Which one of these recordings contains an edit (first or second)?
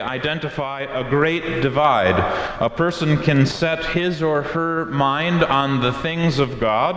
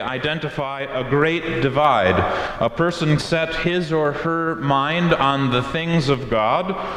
second